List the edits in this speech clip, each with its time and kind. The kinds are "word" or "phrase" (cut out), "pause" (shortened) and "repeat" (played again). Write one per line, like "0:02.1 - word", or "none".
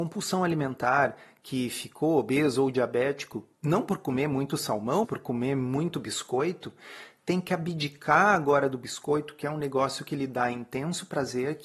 0:03.5 - pause
0:05.0 - word